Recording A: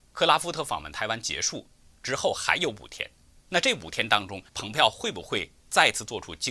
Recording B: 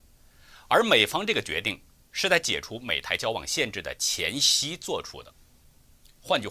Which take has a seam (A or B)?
A